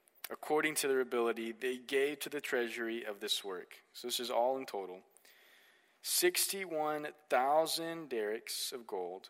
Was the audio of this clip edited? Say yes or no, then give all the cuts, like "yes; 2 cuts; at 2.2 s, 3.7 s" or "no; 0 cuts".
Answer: no; 0 cuts